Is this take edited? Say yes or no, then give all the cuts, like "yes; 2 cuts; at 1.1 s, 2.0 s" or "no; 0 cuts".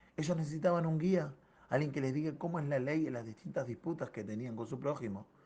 no; 0 cuts